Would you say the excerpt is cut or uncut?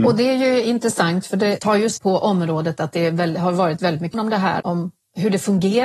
cut